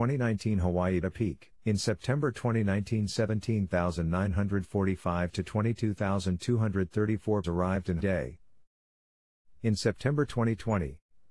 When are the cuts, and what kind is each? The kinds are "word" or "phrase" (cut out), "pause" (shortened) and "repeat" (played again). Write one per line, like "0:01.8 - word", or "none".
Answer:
0:01.0 - phrase
0:01.6 - pause
0:07.4 - word
0:08.0 - phrase